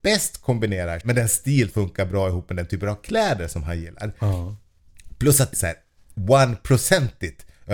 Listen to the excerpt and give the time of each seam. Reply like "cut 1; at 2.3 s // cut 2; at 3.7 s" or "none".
cut 1; at 1.0 s // cut 2; at 1.7 s // cut 3; at 5.5 s